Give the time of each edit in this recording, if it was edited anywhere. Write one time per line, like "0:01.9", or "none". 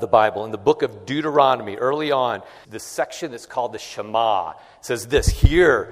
0:02.6